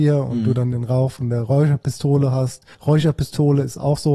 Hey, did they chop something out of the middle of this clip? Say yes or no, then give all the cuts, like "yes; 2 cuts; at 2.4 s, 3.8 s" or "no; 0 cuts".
yes; 1 cut; at 2.7 s